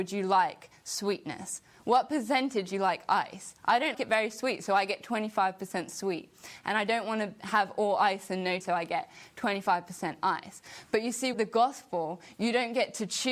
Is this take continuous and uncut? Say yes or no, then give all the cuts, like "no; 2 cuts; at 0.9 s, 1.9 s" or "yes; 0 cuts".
no; 4 cuts; at 2.7 s, 3.9 s, 8.6 s, 11.3 s